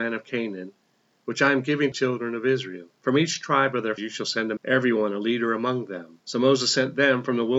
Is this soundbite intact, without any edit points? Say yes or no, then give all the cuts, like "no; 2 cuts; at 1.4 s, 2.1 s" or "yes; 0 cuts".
no; 5 cuts; at 1.9 s, 3.0 s, 4.0 s, 4.6 s, 6.2 s